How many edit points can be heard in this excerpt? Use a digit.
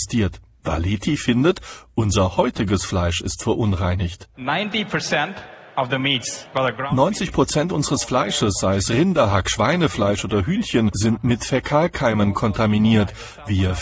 1